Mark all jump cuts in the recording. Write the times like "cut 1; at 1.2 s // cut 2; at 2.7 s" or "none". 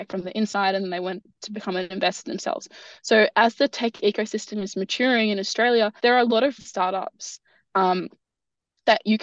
cut 1; at 6.0 s // cut 2; at 6.6 s